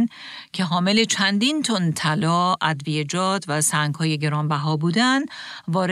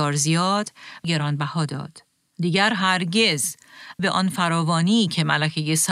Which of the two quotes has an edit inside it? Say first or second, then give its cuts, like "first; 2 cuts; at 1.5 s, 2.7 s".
second; 2 cuts; at 1.0 s, 4.0 s